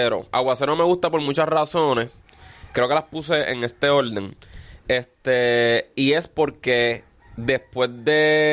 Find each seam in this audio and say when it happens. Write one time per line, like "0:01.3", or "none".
none